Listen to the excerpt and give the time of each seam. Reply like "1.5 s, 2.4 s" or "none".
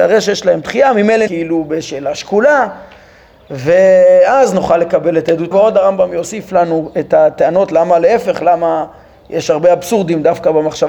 1.3 s, 5.5 s